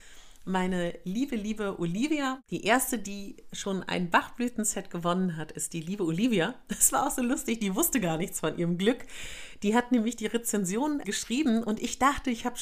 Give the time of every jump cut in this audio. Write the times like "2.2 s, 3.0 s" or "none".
11.0 s